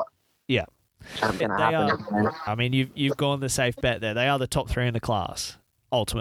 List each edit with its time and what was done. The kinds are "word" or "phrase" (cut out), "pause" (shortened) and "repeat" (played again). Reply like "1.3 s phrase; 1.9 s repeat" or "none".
1.4 s phrase; 2.5 s word